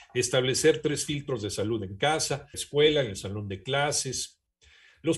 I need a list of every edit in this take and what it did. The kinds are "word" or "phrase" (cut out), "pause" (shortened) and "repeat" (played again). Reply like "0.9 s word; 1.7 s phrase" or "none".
2.5 s phrase